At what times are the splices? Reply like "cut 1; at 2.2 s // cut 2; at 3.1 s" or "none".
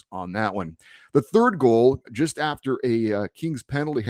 cut 1; at 2.0 s